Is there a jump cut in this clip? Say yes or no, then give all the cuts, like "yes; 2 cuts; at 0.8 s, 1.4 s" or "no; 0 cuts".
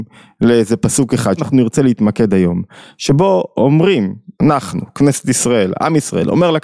yes; 2 cuts; at 1.4 s, 4.3 s